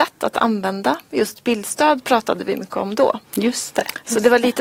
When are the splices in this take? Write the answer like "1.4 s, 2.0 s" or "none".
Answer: 3.2 s